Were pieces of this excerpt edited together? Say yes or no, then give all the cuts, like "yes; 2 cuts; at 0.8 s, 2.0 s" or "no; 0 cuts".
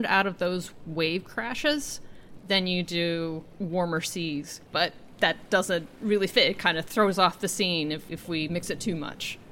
yes; 2 cuts; at 4.7 s, 5.9 s